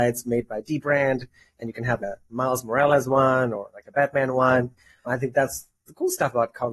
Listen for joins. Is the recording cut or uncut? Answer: uncut